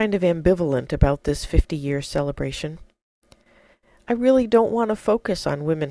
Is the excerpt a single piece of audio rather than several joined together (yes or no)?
yes